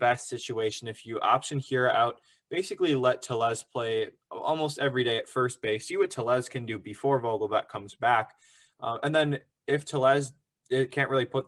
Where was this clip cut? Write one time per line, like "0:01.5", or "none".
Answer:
none